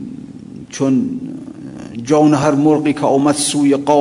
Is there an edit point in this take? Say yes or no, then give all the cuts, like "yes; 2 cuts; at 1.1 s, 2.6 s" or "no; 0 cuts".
no; 0 cuts